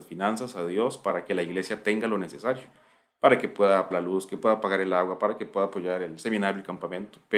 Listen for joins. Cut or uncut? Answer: cut